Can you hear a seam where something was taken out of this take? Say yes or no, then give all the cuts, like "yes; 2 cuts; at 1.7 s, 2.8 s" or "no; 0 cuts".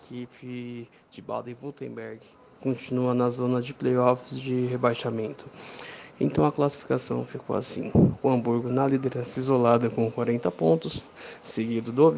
no; 0 cuts